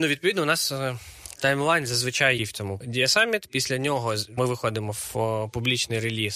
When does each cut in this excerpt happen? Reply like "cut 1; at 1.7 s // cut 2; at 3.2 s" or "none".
cut 1; at 2.4 s // cut 2; at 2.8 s // cut 3; at 4.4 s